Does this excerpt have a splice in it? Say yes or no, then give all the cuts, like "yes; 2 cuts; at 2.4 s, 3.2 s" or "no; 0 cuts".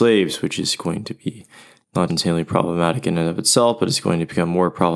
yes; 1 cut; at 2.1 s